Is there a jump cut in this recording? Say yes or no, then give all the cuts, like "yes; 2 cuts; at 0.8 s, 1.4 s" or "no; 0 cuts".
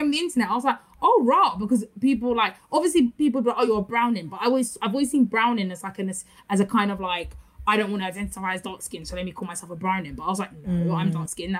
no; 0 cuts